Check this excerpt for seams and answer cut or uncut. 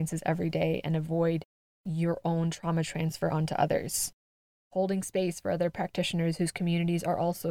uncut